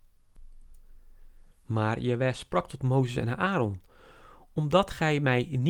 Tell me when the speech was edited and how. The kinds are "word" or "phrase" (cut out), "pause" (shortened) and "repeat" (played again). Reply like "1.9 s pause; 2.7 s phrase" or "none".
1.5 s pause